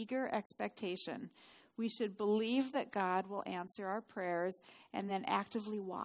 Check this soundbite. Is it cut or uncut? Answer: uncut